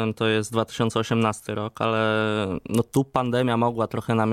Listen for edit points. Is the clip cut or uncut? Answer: uncut